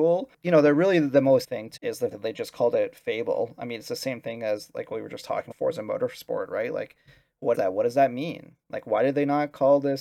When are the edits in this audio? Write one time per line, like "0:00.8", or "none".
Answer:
0:01.4
0:01.8
0:02.1
0:05.5
0:07.5